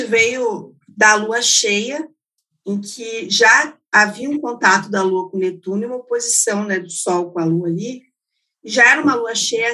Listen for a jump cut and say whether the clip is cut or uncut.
uncut